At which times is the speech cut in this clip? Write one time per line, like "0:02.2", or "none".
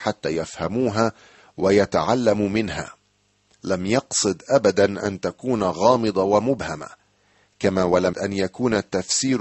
0:08.1